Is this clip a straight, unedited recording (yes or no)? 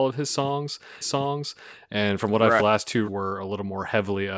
no